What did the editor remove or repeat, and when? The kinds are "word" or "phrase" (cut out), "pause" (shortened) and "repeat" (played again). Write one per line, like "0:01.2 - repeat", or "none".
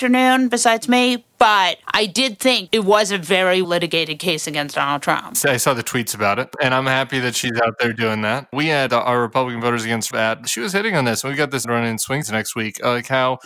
0:01.8 - pause
0:02.7 - word
0:03.6 - word
0:08.9 - word
0:10.1 - word
0:11.6 - word
0:12.2 - word

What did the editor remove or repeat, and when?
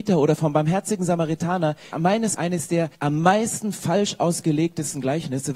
0:01.9 - word
0:02.3 - word
0:02.9 - pause

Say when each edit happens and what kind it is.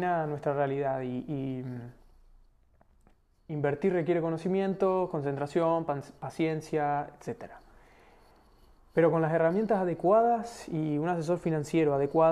none

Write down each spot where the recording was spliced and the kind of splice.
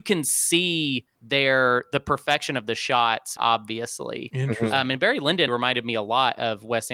0:01.1 - pause
0:03.4 - word
0:05.5 - word

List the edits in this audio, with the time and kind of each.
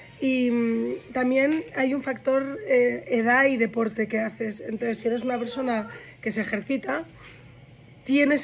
none

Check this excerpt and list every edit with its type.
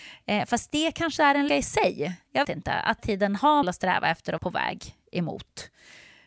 0:01.2 - word
0:01.5 - word
0:02.4 - word
0:03.0 - word
0:03.6 - word
0:04.4 - word

